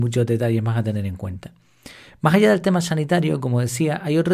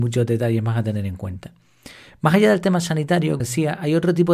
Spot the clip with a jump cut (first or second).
second